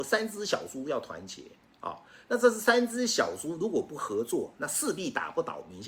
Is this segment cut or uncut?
uncut